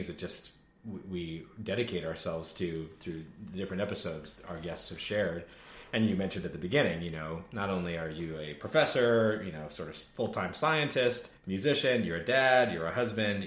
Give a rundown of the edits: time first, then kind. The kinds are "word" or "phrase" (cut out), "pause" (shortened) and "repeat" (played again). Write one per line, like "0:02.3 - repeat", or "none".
0:11.4 - pause